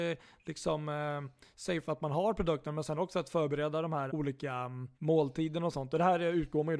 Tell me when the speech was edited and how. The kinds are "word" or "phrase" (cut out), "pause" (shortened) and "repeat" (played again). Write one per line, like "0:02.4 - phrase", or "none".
0:04.1 - word
0:04.9 - pause